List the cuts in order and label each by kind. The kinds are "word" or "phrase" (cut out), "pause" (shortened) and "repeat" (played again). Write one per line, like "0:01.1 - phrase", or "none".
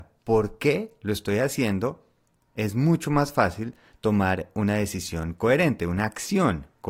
none